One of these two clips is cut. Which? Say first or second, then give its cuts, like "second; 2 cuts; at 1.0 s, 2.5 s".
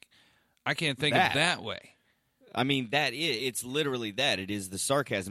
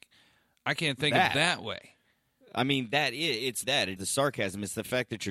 second; 2 cuts; at 3.6 s, 4.0 s